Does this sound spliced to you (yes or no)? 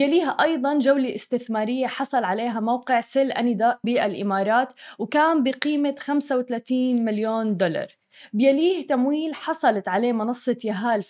yes